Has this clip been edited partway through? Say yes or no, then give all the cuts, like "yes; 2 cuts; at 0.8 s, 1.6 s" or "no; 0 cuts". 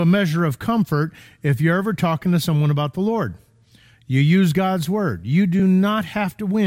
no; 0 cuts